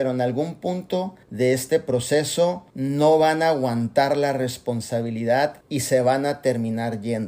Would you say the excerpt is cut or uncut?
cut